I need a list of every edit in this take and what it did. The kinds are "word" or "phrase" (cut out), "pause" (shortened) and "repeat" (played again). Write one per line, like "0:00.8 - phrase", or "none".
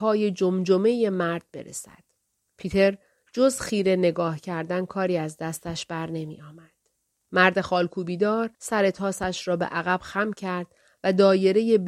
0:02.3 - pause
0:07.1 - pause
0:08.5 - pause